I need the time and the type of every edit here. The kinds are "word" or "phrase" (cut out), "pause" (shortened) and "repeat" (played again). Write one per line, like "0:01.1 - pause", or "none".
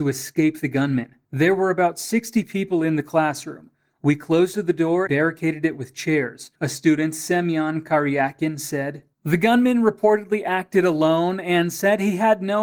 0:01.2 - pause
0:05.1 - word
0:06.6 - pause
0:09.1 - pause

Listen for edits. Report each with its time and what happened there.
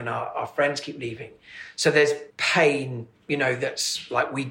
0:02.3 - pause

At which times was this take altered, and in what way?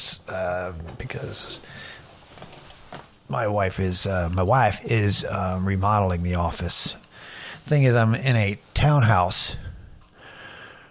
none

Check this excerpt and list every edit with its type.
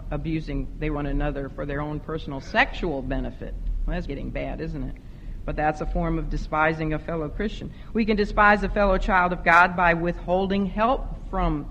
0:01.0 - word
0:04.1 - word

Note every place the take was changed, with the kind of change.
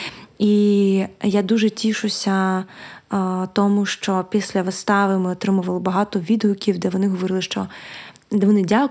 none

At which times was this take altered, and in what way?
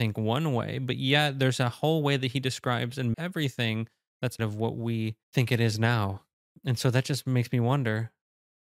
0:03.1 - word
0:04.4 - word
0:05.2 - pause

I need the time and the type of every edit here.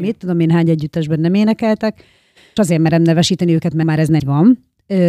0:02.6 - word
0:03.8 - word
0:04.2 - word

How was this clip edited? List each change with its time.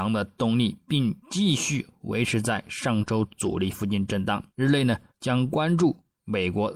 0:01.2 - pause
0:04.5 - pause
0:05.1 - pause

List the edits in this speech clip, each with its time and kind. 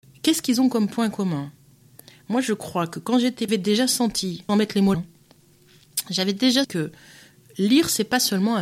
0:03.5 - phrase
0:04.5 - word
0:04.9 - word
0:06.6 - word

